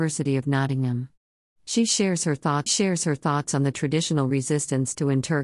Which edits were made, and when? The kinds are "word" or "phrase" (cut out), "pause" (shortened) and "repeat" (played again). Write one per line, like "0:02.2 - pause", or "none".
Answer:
0:02.7 - repeat